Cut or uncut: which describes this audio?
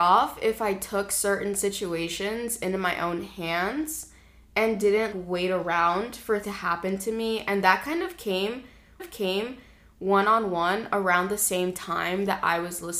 cut